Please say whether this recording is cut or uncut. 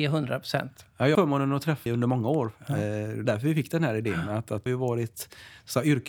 cut